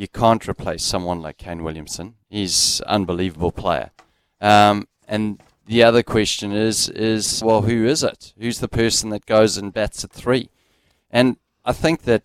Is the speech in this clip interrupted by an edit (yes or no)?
yes